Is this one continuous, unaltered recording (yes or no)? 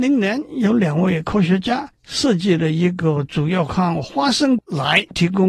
no